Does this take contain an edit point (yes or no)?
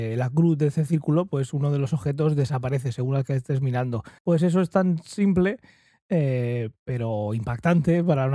yes